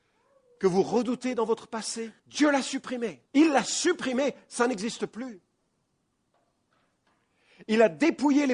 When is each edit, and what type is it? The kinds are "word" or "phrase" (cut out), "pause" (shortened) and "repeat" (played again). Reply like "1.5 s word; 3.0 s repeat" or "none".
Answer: 2.2 s pause; 3.3 s pause